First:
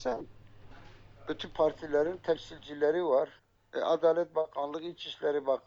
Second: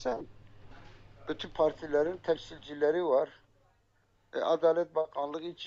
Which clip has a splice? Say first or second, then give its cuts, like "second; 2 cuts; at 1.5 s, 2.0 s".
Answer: first; 1 cut; at 3.4 s